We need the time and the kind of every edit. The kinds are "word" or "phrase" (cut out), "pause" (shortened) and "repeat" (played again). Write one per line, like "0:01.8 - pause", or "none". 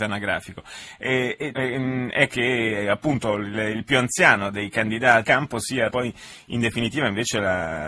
0:01.5 - word
0:02.3 - word
0:05.2 - word
0:05.9 - word